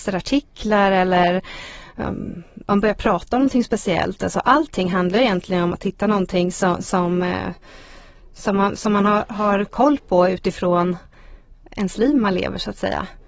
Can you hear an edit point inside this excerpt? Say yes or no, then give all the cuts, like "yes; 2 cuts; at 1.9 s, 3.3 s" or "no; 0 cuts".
no; 0 cuts